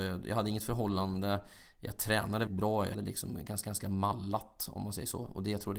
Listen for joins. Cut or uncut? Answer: cut